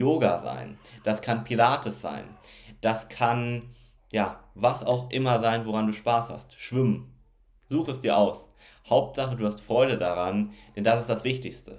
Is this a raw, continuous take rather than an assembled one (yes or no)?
yes